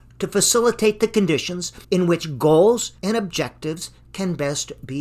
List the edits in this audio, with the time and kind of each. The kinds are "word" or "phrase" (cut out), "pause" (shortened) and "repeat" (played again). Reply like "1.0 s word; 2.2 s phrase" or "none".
1.8 s pause; 3.0 s pause